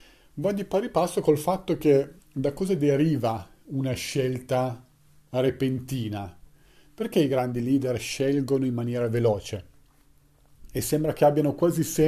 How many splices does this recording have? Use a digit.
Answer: 0